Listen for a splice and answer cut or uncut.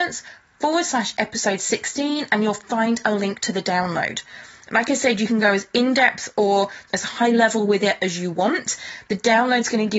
uncut